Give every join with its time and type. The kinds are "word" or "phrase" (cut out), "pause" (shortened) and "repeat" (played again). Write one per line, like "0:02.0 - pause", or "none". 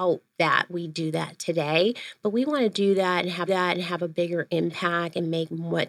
0:03.5 - repeat